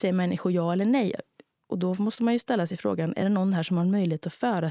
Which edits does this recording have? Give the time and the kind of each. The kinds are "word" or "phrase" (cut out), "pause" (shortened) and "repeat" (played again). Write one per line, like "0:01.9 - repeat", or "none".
none